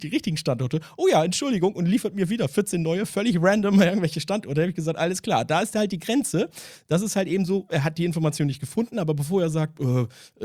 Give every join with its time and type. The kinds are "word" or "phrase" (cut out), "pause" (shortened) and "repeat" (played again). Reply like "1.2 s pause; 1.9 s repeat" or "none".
none